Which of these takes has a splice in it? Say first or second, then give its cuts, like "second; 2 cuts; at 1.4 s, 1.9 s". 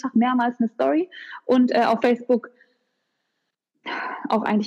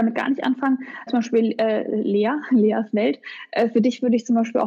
second; 1 cut; at 1.1 s